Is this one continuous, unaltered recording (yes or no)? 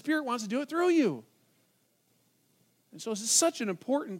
yes